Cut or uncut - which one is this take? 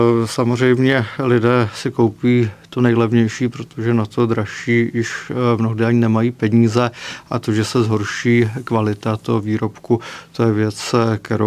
uncut